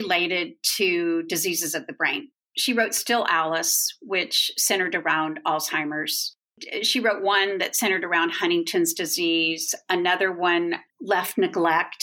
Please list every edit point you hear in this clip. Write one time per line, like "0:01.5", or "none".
0:10.9